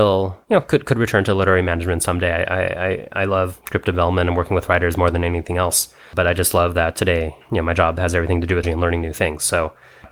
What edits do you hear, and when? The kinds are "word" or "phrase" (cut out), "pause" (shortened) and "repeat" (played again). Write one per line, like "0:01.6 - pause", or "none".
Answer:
0:08.6 - word